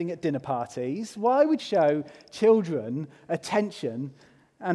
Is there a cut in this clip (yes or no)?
yes